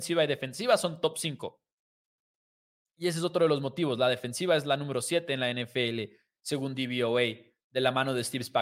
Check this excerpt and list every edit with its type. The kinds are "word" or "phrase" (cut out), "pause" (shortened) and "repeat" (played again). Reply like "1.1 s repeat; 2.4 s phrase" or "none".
none